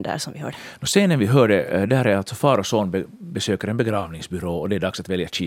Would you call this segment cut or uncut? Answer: uncut